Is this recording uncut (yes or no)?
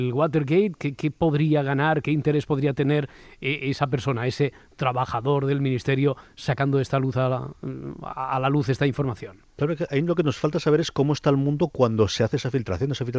yes